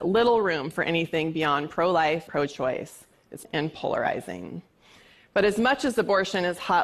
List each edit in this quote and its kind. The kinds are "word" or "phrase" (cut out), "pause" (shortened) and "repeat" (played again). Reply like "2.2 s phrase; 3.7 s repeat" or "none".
2.3 s word; 3.4 s word